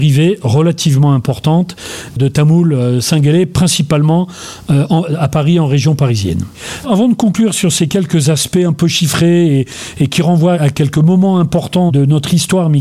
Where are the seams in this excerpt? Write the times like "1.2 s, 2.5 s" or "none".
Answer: 2.2 s